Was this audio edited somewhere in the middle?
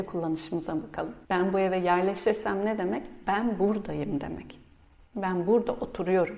yes; 1 cut; at 1.3 s

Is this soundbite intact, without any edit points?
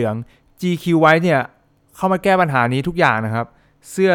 yes; 0 cuts

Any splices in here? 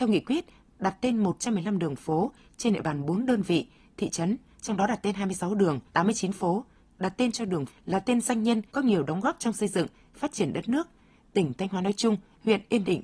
yes; 3 cuts; at 5.9 s, 7.7 s, 8.7 s

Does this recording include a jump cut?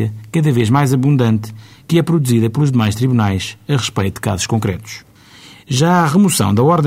no; 0 cuts

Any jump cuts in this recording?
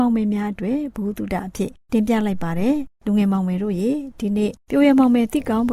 yes; 1 cut; at 4.6 s

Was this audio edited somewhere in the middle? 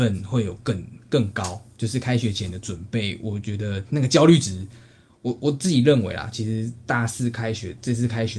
no; 0 cuts

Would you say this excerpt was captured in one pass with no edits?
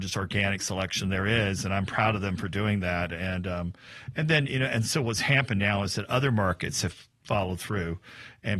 yes; 0 cuts

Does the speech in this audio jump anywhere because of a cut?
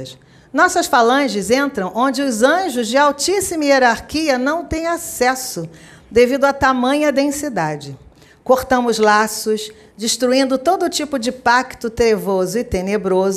no; 0 cuts

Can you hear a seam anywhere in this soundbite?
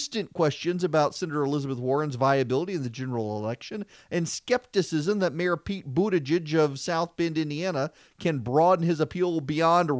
no; 0 cuts

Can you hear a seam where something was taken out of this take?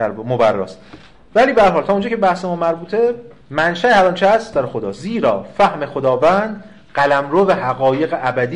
yes; 2 cuts; at 3.4 s, 4.5 s

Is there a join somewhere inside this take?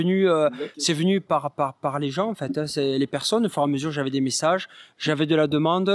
no; 0 cuts

